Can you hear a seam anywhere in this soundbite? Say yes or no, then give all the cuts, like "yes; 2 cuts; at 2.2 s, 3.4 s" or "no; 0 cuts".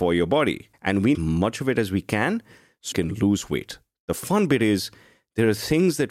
yes; 2 cuts; at 1.1 s, 2.9 s